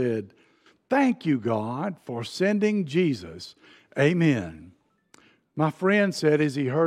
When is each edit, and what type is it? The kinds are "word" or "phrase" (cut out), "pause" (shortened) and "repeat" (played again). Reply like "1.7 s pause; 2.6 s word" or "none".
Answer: none